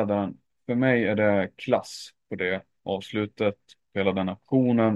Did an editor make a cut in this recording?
no; 0 cuts

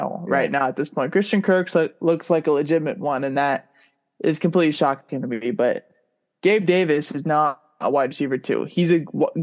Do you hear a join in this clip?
no; 0 cuts

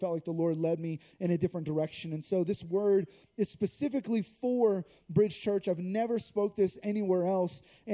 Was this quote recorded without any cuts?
yes; 0 cuts

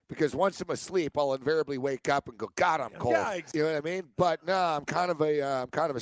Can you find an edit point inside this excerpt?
no; 0 cuts

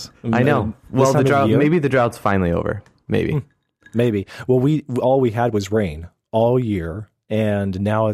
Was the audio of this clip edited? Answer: no; 0 cuts

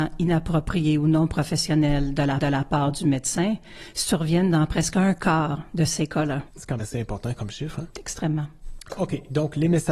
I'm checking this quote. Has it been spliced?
yes; 2 cuts; at 2.4 s, 6.8 s

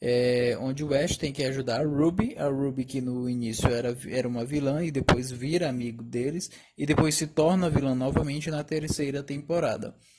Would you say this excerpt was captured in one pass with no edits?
yes; 0 cuts

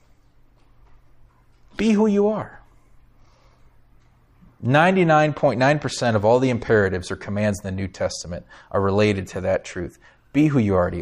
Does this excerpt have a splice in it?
no; 0 cuts

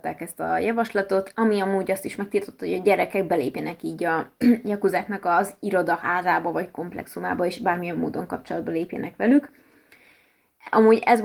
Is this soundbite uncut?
yes; 0 cuts

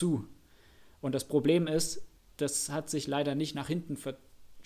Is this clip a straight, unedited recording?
yes; 0 cuts

